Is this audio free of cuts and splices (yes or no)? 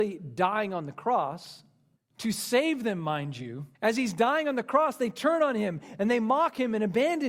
no